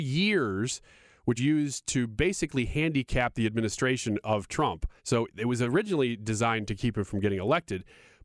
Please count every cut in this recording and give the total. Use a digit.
2